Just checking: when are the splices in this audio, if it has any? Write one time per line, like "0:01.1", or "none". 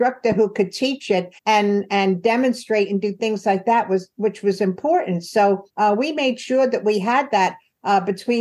0:01.4
0:05.7